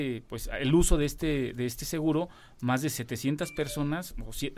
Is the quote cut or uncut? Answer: uncut